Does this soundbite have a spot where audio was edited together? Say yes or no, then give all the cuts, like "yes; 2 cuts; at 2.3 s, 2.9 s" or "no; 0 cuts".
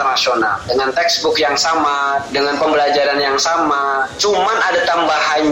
no; 0 cuts